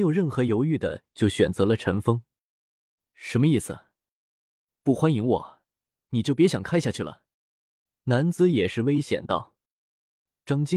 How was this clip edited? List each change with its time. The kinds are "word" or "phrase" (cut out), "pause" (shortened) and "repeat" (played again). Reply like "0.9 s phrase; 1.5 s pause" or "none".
7.3 s pause